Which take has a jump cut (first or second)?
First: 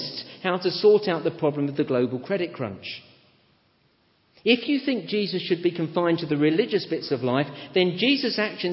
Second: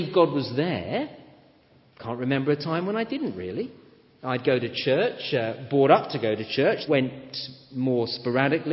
second